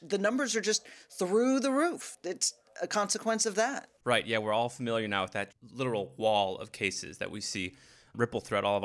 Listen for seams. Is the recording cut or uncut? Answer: cut